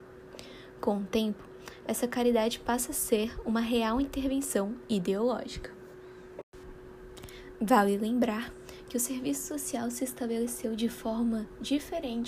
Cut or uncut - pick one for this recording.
uncut